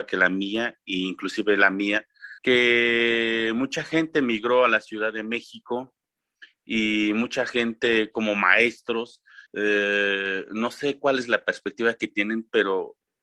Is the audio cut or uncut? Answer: cut